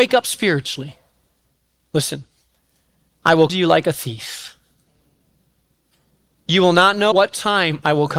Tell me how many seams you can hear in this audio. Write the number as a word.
two